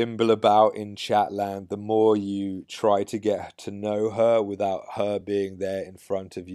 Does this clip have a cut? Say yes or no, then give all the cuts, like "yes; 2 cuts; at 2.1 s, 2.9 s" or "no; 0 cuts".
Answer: no; 0 cuts